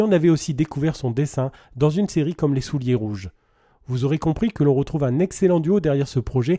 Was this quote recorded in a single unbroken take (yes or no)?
yes